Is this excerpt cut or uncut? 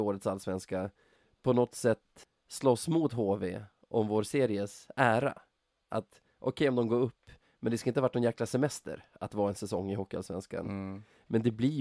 uncut